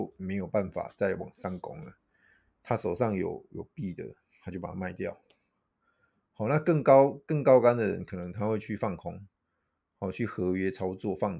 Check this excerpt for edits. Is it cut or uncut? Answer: uncut